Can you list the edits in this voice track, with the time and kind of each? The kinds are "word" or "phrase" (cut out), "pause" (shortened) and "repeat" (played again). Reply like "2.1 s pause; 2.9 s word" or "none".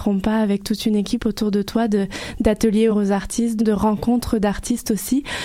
2.9 s word; 3.6 s phrase